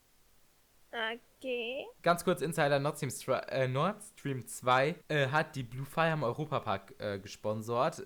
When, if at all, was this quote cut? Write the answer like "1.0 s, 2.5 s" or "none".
5.0 s